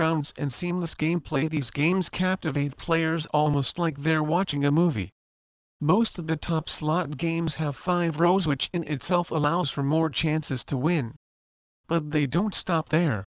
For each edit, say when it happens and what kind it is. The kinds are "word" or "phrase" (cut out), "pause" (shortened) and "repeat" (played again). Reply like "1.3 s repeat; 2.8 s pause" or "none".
none